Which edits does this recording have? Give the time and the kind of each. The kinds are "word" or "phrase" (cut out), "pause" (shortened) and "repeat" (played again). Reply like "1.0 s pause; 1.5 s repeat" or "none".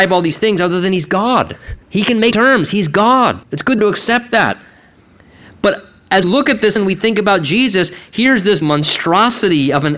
1.8 s pause; 2.3 s phrase; 3.4 s pause; 3.8 s phrase; 6.2 s word; 6.8 s word; 8.6 s word